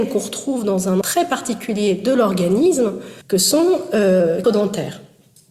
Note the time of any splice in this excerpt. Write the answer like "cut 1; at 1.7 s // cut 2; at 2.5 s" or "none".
cut 1; at 1.0 s // cut 2; at 3.2 s // cut 3; at 4.4 s